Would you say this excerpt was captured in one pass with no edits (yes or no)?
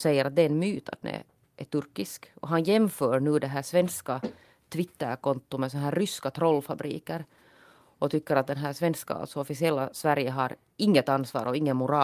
no